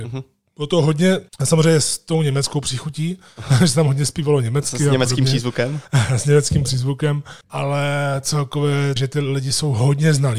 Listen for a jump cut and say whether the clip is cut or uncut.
cut